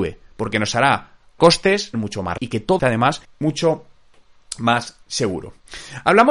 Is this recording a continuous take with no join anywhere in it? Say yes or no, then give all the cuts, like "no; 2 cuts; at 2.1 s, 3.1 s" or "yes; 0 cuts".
no; 6 cuts; at 1.4 s, 1.9 s, 2.4 s, 2.8 s, 3.2 s, 5.0 s